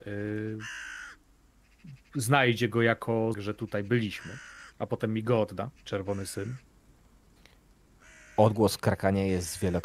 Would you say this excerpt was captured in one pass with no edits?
no; 3 cuts; at 3.3 s, 4.7 s, 5.7 s

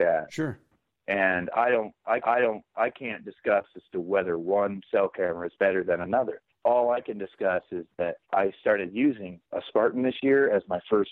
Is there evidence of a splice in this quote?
yes; 4 cuts; at 2.2 s, 6.5 s, 8.2 s, 9.5 s

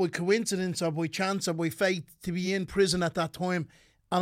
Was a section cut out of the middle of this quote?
no; 0 cuts

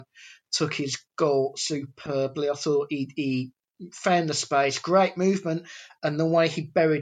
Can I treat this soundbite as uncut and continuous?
yes; 0 cuts

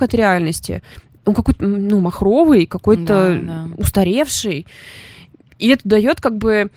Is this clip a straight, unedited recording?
yes; 0 cuts

